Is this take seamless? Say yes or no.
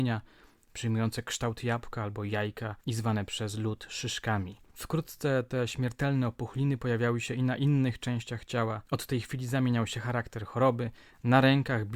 no